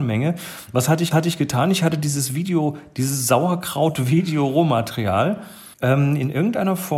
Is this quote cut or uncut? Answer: cut